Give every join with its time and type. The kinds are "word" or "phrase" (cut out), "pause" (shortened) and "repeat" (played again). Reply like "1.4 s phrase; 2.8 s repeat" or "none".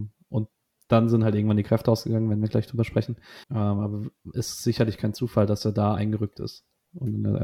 3.4 s pause